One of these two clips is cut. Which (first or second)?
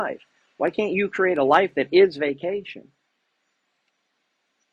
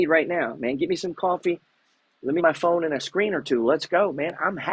second